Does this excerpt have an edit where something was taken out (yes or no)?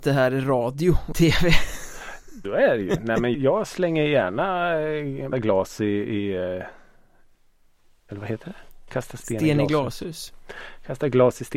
yes